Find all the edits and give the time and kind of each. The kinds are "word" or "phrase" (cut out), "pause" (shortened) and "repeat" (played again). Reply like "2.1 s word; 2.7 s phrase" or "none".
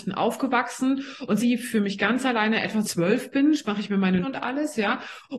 1.4 s word; 2.8 s phrase; 4.2 s word